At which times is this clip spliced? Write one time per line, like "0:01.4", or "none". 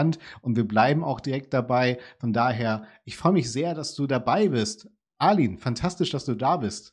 none

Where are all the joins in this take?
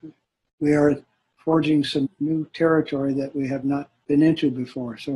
0:02.0

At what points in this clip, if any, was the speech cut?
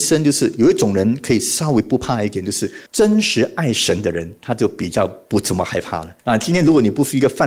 0:02.9
0:06.2

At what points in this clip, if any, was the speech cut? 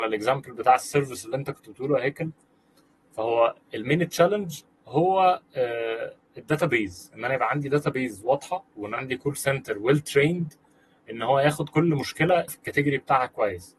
0:09.0
0:12.5

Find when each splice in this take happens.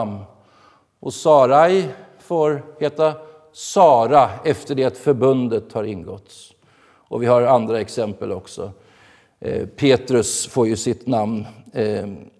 none

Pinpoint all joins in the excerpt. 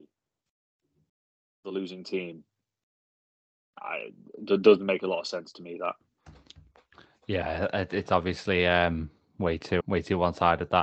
0:09.8

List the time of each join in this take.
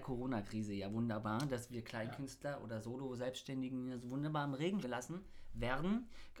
0:04.8

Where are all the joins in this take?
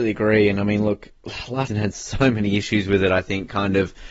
0:01.7

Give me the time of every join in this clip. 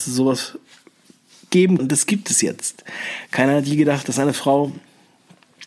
0:01.8

